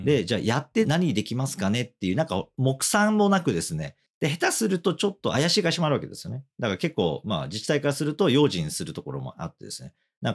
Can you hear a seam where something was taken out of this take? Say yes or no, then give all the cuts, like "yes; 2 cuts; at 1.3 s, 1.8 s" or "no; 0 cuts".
no; 0 cuts